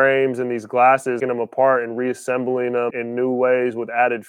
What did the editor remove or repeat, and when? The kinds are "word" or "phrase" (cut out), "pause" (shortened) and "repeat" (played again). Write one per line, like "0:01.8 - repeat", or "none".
0:01.2 - phrase
0:02.9 - word